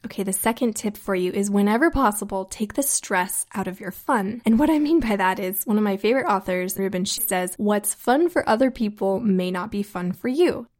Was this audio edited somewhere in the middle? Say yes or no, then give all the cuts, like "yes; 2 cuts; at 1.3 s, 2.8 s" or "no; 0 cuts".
yes; 2 cuts; at 6.8 s, 7.2 s